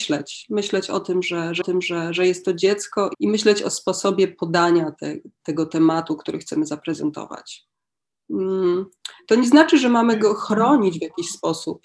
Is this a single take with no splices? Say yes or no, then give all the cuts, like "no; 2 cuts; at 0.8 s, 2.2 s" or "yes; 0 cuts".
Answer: no; 2 cuts; at 1.6 s, 3.1 s